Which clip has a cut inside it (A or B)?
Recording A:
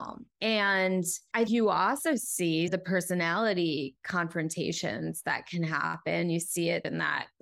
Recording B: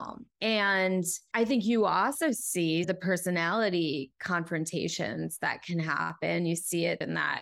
A